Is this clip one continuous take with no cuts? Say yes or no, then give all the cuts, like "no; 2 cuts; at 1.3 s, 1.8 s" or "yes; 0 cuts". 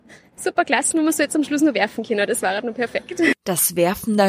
yes; 0 cuts